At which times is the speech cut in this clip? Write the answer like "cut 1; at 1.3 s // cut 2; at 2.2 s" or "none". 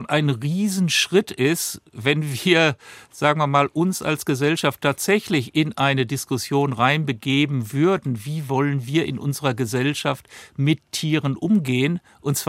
none